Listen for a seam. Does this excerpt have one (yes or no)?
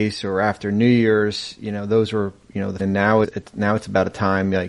yes